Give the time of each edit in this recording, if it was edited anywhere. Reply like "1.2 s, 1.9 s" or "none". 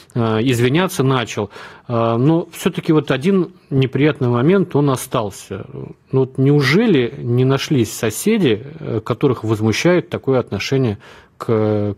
none